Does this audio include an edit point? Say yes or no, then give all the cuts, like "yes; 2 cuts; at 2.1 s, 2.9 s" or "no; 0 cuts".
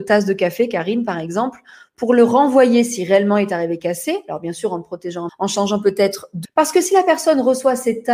yes; 2 cuts; at 5.3 s, 6.4 s